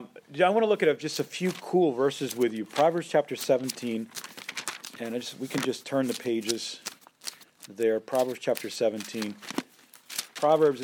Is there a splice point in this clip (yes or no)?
no